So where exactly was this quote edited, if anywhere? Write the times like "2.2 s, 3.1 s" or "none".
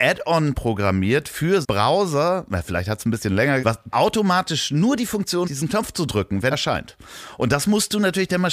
1.6 s, 3.6 s, 3.9 s, 5.4 s, 6.5 s